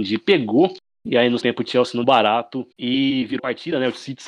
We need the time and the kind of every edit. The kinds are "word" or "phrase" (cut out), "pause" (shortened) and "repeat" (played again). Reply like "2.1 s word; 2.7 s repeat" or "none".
1.4 s word; 2.0 s word; 2.7 s pause; 3.4 s word